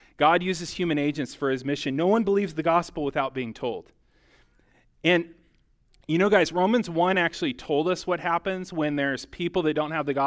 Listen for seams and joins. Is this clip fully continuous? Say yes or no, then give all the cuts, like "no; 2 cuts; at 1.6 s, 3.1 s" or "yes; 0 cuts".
yes; 0 cuts